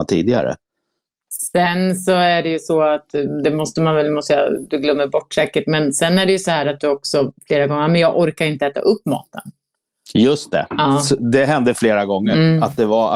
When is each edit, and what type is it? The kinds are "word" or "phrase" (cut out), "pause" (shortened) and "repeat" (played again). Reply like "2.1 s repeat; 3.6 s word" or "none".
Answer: none